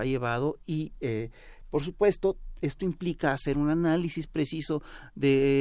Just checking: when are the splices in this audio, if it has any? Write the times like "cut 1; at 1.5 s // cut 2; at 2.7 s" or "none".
none